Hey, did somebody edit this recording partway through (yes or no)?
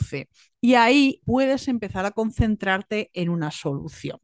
yes